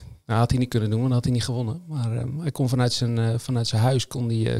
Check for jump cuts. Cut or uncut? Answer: uncut